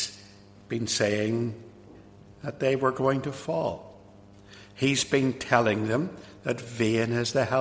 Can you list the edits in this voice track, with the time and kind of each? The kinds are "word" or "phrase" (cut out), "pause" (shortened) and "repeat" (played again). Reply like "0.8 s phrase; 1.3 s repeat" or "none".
none